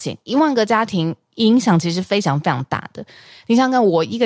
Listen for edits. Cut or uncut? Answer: uncut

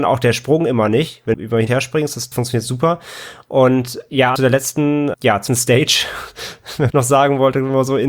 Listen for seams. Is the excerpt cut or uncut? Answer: cut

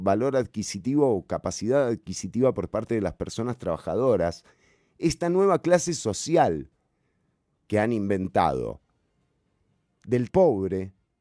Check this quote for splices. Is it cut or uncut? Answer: cut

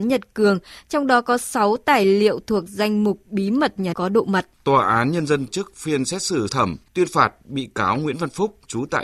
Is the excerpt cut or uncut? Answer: cut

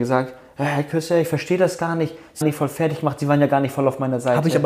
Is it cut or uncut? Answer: cut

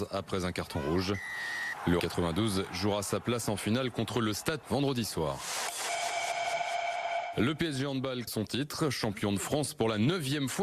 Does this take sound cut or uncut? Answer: cut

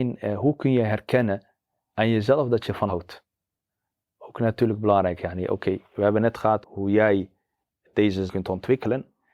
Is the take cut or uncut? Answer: cut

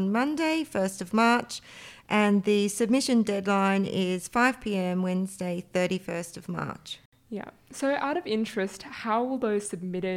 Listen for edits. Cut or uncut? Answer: uncut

